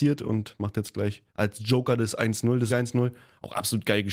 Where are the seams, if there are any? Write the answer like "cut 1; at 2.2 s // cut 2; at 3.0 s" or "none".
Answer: cut 1; at 1.3 s // cut 2; at 2.7 s